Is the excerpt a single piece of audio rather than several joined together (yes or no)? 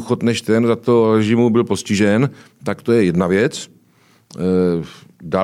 yes